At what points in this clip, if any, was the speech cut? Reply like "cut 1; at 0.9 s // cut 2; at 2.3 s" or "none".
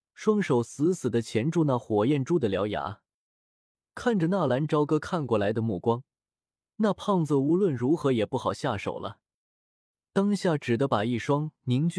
none